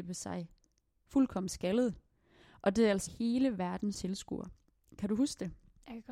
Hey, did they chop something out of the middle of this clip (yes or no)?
yes